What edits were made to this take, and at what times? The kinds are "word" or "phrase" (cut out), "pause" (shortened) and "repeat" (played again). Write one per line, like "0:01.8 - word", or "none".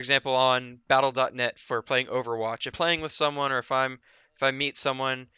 0:02.7 - word